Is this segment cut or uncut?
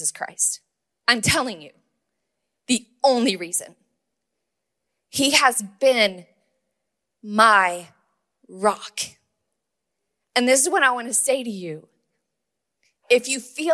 uncut